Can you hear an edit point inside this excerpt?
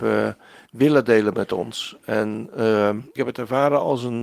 yes; 1 cut; at 3.2 s

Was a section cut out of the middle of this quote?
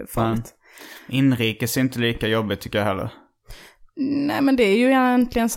no; 0 cuts

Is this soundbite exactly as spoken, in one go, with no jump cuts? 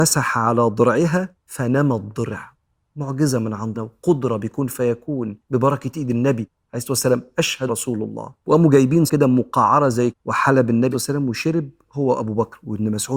no; 8 cuts; at 1.4 s, 3.7 s, 5.4 s, 7.7 s, 8.4 s, 9.1 s, 10.1 s, 10.9 s

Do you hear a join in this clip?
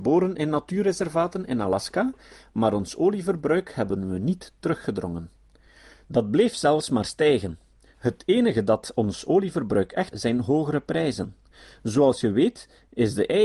yes; 1 cut; at 10.1 s

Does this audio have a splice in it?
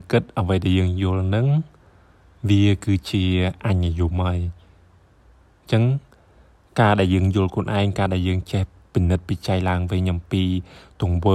no; 0 cuts

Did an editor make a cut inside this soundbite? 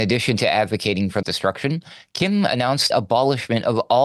yes; 2 cuts; at 1.2 s, 2.9 s

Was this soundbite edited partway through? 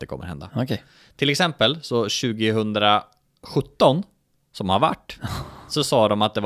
no; 0 cuts

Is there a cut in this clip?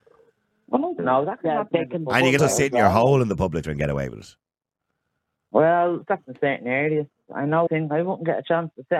yes; 4 cuts; at 1.0 s, 2.4 s, 3.6 s, 7.7 s

